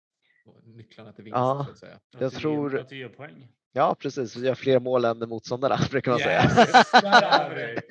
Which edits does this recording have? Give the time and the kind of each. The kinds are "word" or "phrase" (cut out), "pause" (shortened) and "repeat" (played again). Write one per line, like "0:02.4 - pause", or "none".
0:02.0 - pause
0:03.6 - pause